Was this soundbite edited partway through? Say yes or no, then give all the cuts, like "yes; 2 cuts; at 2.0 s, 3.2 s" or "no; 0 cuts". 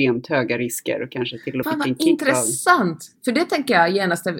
yes; 2 cuts; at 1.6 s, 3.2 s